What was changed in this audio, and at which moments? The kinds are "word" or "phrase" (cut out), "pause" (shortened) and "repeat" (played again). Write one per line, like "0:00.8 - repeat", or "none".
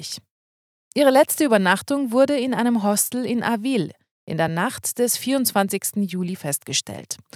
none